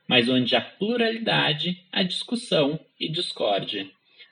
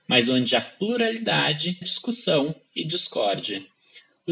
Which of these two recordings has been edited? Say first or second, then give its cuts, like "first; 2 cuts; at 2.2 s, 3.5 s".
second; 1 cut; at 1.8 s